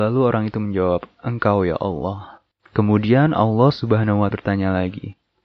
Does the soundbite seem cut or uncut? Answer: cut